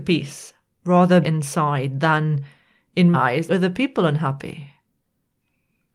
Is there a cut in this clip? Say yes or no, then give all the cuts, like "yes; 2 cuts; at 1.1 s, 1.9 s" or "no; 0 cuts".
yes; 3 cuts; at 1.2 s, 3.1 s, 3.5 s